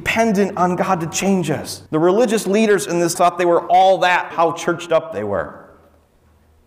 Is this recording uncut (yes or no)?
no